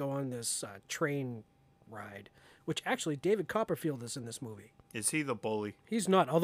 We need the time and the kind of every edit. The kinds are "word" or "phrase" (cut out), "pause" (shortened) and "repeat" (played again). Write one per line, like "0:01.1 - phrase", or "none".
0:04.8 - pause